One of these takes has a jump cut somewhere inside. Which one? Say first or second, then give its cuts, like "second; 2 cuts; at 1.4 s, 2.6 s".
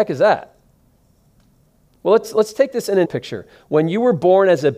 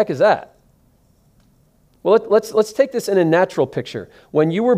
first; 2 cuts; at 2.2 s, 3.0 s